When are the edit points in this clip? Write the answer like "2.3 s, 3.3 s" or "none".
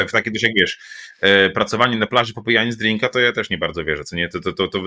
none